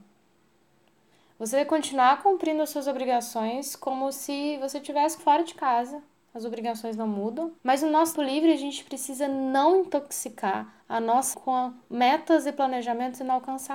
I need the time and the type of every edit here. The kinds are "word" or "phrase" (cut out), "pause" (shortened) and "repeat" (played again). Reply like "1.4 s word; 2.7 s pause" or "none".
5.2 s word; 7.6 s pause; 8.1 s word; 10.8 s pause; 11.3 s word